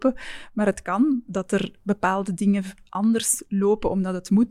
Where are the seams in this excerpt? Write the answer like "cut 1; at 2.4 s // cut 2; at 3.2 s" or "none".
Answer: none